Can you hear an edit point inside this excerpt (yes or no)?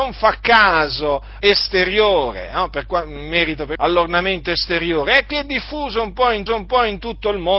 yes